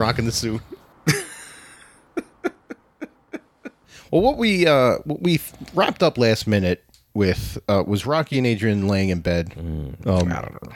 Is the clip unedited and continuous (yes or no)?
yes